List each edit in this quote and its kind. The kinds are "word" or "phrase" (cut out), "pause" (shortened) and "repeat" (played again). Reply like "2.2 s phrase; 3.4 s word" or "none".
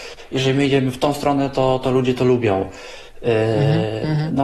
none

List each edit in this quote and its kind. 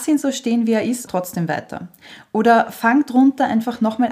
1.1 s phrase

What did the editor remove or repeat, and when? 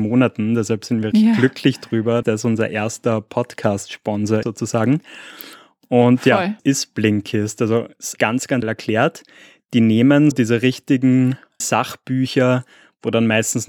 1.1 s word; 2.2 s word; 4.4 s word; 6.6 s word; 8.2 s word; 8.6 s word; 10.3 s word; 11.6 s word

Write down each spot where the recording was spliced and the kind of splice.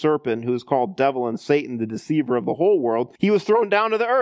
3.2 s pause

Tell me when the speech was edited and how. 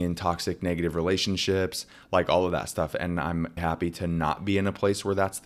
3.6 s word

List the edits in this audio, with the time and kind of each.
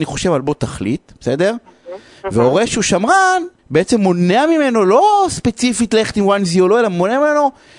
3.6 s pause

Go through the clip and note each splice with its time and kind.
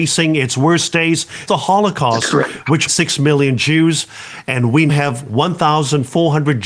1.5 s word; 2.9 s word; 4.9 s word

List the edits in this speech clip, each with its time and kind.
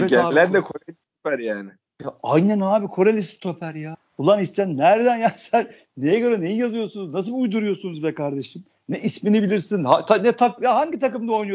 none

